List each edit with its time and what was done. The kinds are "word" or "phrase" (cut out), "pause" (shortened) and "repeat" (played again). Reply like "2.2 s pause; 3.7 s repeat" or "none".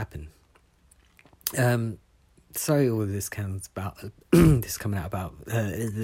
none